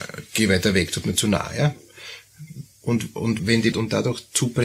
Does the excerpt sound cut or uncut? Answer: cut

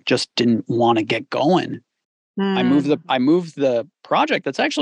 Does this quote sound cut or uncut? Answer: uncut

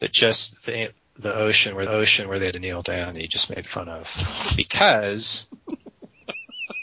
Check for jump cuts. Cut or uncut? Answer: cut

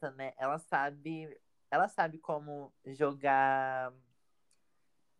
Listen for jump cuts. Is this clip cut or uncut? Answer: uncut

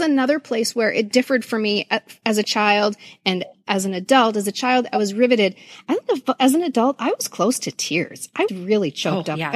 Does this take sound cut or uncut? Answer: cut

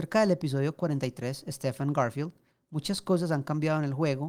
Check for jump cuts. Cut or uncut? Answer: uncut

